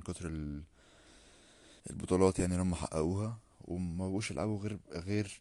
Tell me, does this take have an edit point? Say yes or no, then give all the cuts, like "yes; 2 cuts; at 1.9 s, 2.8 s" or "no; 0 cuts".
yes; 1 cut; at 1.8 s